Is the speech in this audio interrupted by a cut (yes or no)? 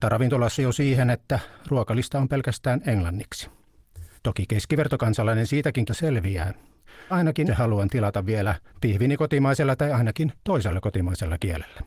yes